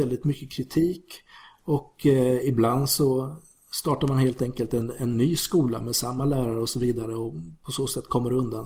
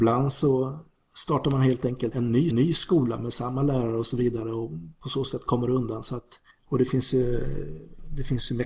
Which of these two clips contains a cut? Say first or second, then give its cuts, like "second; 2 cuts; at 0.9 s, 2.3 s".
second; 3 cuts; at 2.1 s, 2.5 s, 6.5 s